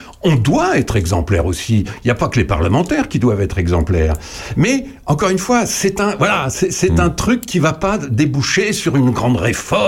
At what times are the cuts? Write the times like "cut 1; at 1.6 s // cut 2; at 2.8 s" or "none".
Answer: none